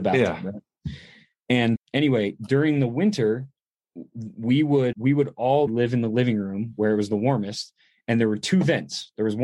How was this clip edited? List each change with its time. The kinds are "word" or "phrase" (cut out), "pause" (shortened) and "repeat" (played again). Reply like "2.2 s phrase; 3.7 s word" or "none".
1.8 s word; 4.9 s word; 5.7 s word